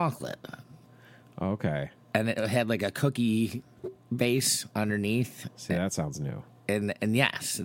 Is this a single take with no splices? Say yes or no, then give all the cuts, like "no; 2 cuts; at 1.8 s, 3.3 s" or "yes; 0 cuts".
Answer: yes; 0 cuts